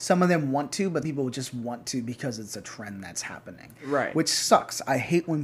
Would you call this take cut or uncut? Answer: cut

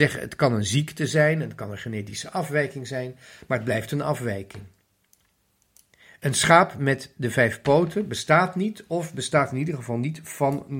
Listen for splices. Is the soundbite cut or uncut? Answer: uncut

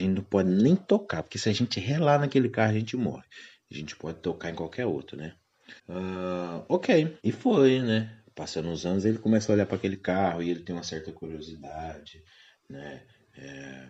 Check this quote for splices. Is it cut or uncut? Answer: cut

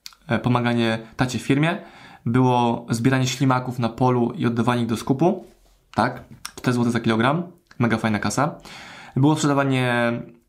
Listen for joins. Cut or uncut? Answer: uncut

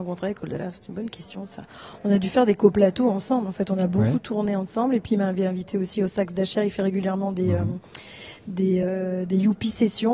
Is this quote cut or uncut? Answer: uncut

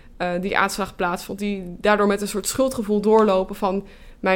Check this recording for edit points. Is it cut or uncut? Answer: uncut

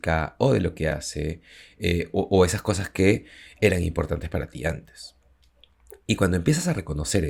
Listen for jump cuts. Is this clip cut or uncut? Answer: uncut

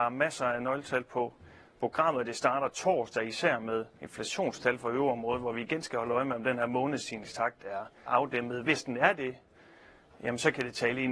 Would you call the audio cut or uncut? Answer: cut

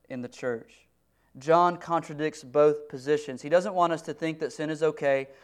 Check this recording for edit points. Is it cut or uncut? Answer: uncut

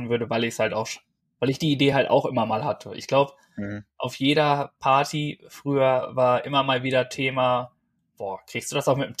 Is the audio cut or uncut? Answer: uncut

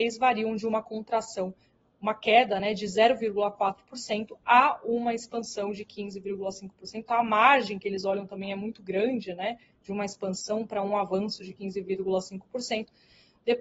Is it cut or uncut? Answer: uncut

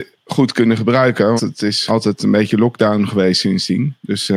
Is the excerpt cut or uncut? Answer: cut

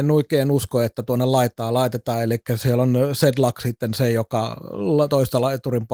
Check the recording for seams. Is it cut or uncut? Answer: uncut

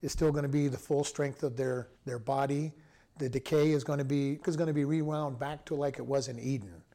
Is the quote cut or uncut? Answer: cut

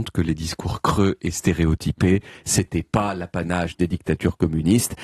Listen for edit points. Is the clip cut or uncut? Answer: uncut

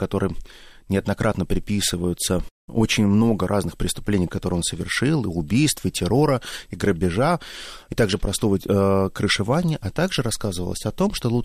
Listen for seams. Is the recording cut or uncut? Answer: uncut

